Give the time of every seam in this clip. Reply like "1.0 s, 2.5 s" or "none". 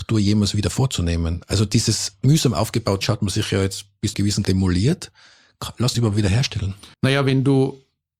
3.0 s, 4.1 s, 4.4 s, 5.9 s, 6.9 s